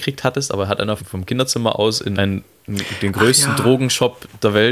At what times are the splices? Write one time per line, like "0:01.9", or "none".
0:01.0
0:02.1